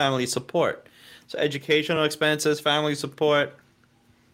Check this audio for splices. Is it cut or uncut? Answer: uncut